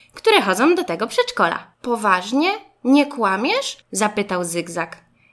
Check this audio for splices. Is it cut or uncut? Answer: cut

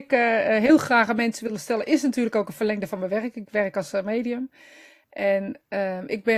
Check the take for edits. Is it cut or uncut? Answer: uncut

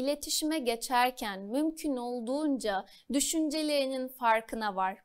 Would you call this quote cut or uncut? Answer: uncut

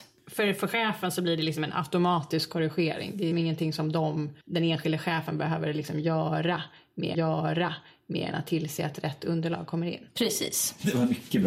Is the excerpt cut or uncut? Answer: cut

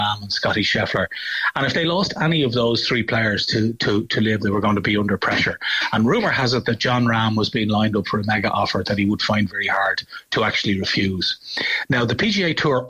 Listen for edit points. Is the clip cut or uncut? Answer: cut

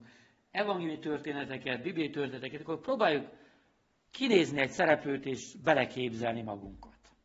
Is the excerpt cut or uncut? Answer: uncut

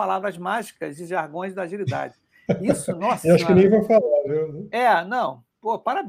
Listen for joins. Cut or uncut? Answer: uncut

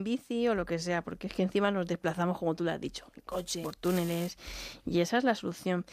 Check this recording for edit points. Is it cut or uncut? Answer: cut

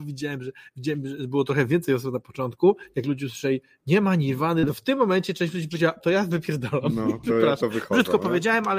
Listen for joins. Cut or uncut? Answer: cut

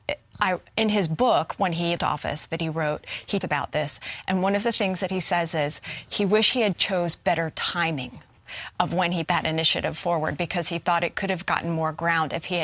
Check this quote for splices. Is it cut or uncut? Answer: cut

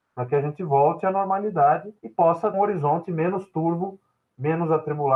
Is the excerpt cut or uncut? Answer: cut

